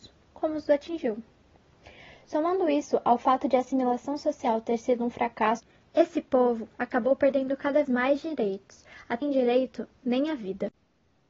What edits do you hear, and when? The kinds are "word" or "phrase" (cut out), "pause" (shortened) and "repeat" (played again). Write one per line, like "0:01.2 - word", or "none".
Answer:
0:07.8 - word
0:09.2 - phrase
0:10.0 - pause